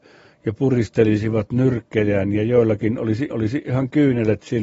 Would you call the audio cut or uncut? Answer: cut